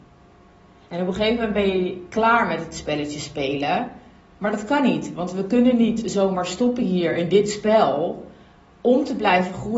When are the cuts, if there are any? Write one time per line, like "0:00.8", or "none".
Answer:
none